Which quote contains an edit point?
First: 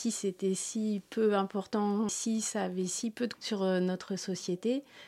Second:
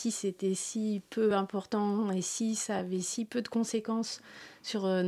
first; 2 cuts; at 2.1 s, 3.3 s

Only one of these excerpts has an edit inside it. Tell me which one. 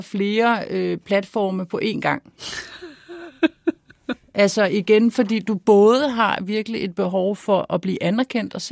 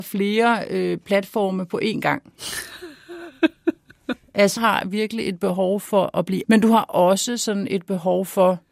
second; 2 cuts; at 4.6 s, 6.4 s

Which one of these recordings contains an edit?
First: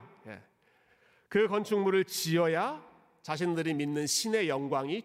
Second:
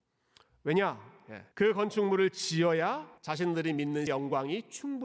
second; 3 cuts; at 1.5 s, 3.2 s, 4.1 s

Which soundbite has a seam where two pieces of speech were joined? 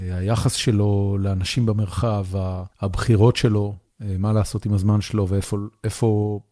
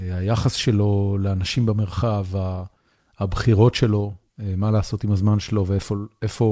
first; 1 cut; at 2.7 s

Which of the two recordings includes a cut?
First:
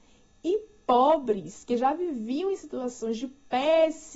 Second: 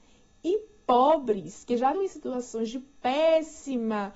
second; 1 cut; at 1.9 s

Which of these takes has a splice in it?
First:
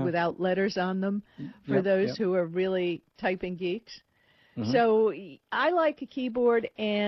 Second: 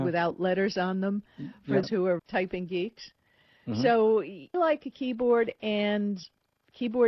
second; 3 cuts; at 1.8 s, 2.2 s, 4.5 s

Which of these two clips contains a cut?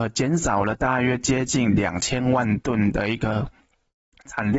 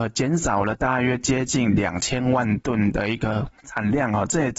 second; 1 cut; at 3.6 s

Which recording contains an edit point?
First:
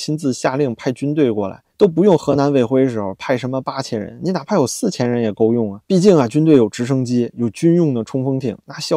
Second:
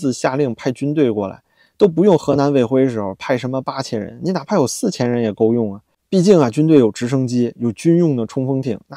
first; 2 cuts; at 1.7 s, 5.8 s

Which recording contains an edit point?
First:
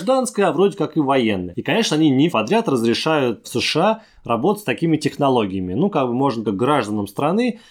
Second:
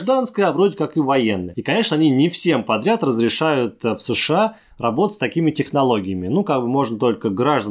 first; 3 cuts; at 2.3 s, 3.4 s, 6.4 s

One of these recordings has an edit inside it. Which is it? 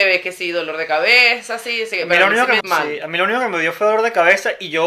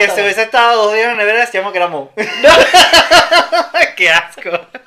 first; 1 cut; at 2.6 s

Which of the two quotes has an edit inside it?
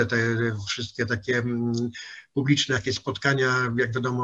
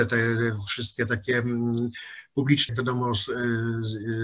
second; 1 cut; at 2.7 s

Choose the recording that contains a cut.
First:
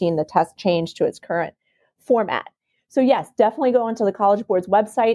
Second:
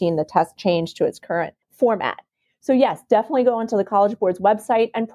second; 1 cut; at 1.6 s

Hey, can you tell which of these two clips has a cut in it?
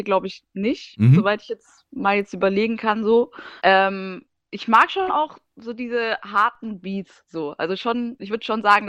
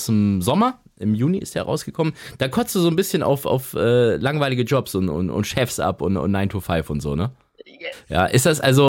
first; 1 cut; at 3.6 s

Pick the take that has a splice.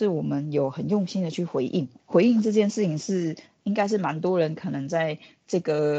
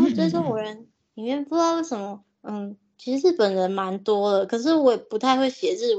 first; 1 cut; at 2.0 s

